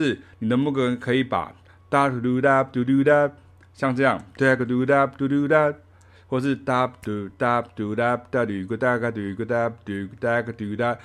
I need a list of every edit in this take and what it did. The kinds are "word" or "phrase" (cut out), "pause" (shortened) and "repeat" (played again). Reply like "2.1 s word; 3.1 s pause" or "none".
none